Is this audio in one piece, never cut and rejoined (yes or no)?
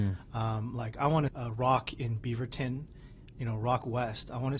no